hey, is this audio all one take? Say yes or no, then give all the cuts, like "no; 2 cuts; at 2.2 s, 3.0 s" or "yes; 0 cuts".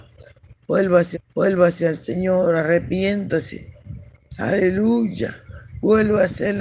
no; 1 cut; at 1.1 s